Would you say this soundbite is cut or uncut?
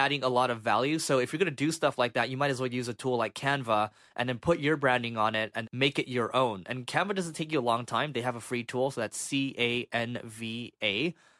cut